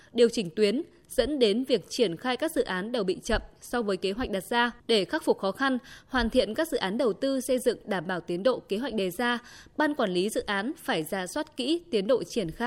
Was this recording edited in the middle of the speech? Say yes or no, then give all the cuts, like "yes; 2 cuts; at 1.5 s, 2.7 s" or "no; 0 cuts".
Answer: yes; 1 cut; at 4.8 s